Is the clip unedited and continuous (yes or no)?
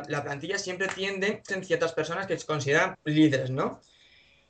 no